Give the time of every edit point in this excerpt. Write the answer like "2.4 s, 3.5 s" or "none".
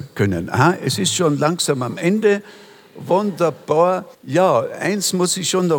4.1 s